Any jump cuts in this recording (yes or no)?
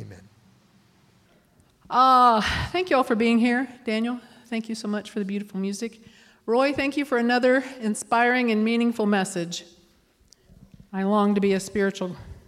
no